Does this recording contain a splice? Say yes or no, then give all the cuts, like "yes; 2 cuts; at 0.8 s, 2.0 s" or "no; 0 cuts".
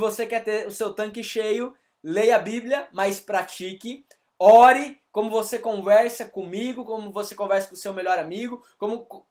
no; 0 cuts